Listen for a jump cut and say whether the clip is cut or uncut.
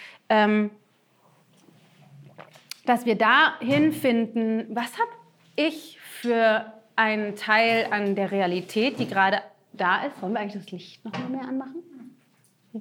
uncut